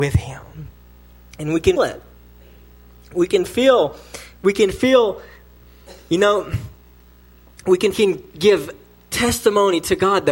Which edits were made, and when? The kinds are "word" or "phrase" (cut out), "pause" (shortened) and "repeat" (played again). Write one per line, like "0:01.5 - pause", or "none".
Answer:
0:01.8 - word
0:07.9 - phrase